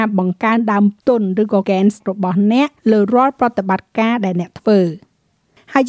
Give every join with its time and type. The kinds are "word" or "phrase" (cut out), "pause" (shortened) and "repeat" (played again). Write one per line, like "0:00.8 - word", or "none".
0:01.6 - word
0:02.0 - word
0:02.8 - pause